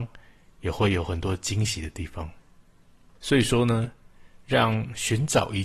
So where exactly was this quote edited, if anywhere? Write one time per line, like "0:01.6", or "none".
none